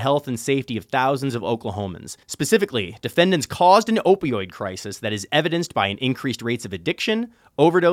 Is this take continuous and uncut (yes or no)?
no